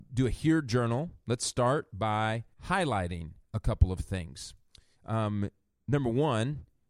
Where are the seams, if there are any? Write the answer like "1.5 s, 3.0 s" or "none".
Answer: 2.5 s